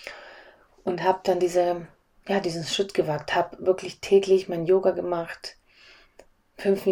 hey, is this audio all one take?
yes; 0 cuts

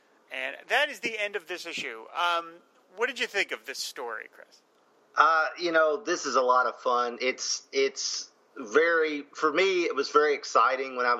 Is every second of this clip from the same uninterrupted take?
yes; 0 cuts

